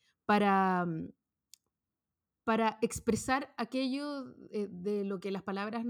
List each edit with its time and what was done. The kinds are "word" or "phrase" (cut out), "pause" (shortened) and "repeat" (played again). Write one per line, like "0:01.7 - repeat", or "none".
none

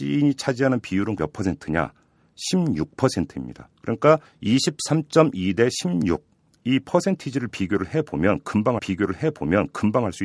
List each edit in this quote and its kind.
0:01.2 - word
0:04.2 - pause
0:08.8 - repeat

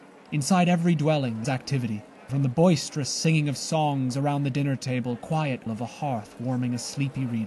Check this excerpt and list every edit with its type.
0:01.4 - word
0:02.3 - word
0:05.2 - word
0:05.7 - word

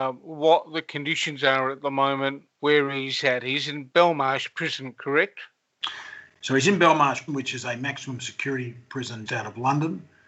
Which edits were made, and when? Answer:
0:02.5 - pause
0:07.3 - word
0:09.3 - word

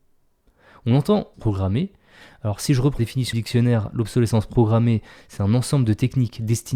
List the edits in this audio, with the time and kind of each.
0:01.3 - phrase
0:03.0 - word
0:03.3 - word

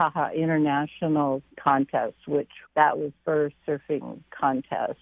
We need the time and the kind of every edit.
0:01.5 - word
0:02.7 - pause
0:03.2 - word
0:03.6 - word

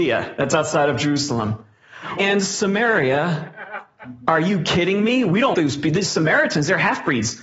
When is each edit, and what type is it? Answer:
0:02.2 - word
0:05.5 - word

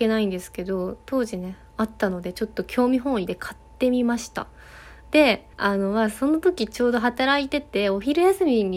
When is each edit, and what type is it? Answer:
0:05.5 - pause

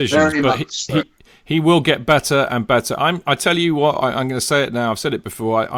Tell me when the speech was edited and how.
none

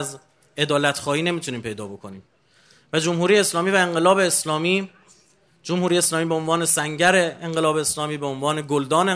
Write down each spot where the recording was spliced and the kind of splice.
none

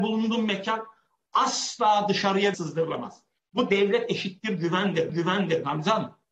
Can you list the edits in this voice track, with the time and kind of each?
0:02.5 - word
0:05.1 - repeat

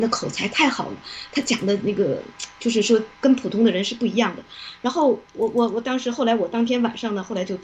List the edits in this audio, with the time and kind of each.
0:03.1 - pause

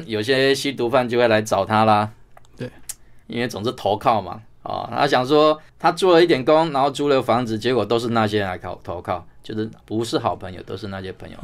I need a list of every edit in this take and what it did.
0:03.2 - pause
0:05.7 - pause
0:09.8 - pause

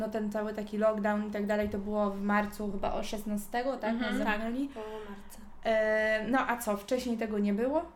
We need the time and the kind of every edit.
none

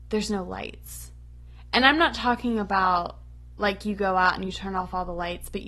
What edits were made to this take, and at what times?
none

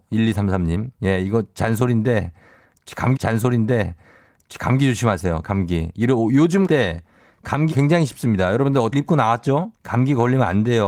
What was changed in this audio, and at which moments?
0:00.9 - pause
0:03.2 - repeat
0:06.7 - word
0:07.7 - word
0:08.9 - word
0:09.8 - pause

